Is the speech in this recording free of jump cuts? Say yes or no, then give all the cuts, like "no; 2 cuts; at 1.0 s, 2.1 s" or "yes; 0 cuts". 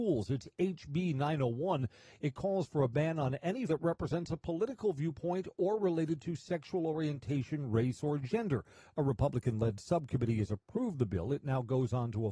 no; 1 cut; at 3.7 s